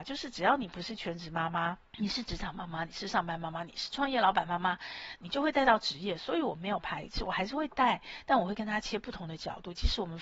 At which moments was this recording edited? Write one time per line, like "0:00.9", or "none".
0:01.9